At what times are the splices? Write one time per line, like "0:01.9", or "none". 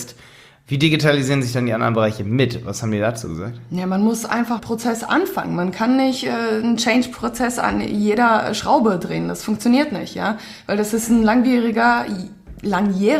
0:04.6